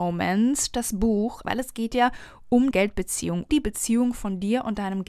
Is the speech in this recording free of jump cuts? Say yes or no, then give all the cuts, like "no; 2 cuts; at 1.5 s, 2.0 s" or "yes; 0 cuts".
no; 3 cuts; at 1.4 s, 2.7 s, 3.5 s